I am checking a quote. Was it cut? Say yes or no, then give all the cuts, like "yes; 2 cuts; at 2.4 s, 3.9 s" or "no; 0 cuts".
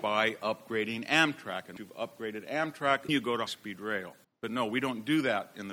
yes; 4 cuts; at 1.8 s, 3.1 s, 3.5 s, 4.2 s